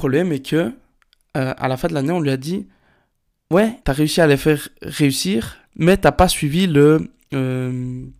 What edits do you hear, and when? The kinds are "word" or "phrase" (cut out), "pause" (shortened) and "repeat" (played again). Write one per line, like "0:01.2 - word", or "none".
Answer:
0:03.8 - pause
0:05.7 - pause